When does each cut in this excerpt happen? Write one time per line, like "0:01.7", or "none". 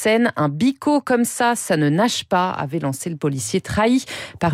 none